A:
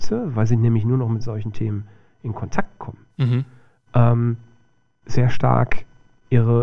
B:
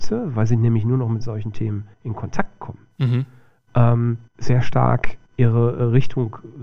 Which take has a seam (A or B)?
B